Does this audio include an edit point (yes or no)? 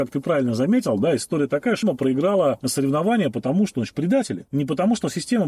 yes